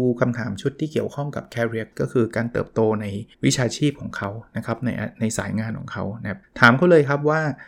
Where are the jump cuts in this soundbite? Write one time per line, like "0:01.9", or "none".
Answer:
0:01.9
0:03.3
0:06.4